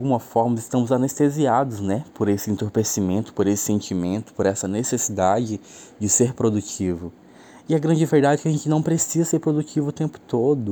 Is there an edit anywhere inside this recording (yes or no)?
no